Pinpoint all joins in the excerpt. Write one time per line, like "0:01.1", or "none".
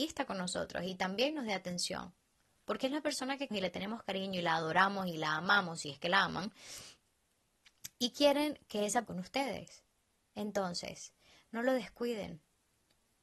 0:03.5
0:09.0